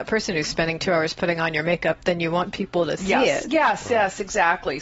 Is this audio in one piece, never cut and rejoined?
yes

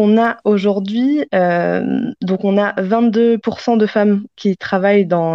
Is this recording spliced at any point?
no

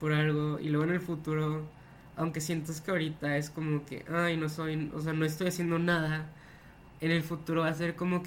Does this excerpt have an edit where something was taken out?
no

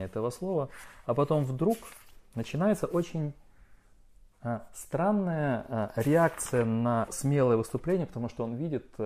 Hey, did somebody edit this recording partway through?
yes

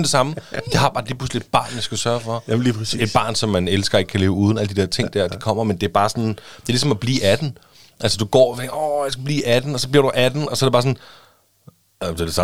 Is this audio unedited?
yes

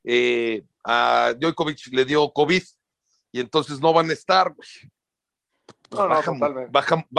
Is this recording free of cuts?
yes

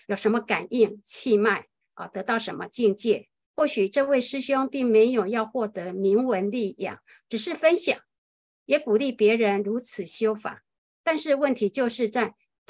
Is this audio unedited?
yes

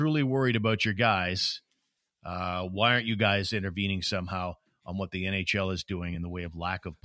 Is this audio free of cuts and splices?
yes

